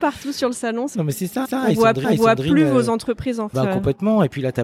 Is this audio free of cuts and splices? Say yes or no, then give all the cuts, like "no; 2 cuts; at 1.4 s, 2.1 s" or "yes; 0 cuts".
no; 4 cuts; at 1.0 s, 1.5 s, 2.0 s, 3.5 s